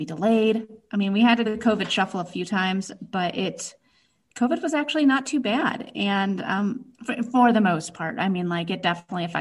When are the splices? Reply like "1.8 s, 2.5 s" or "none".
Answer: 1.5 s, 4.3 s, 6.9 s